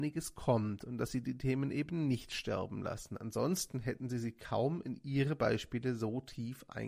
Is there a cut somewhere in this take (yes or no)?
no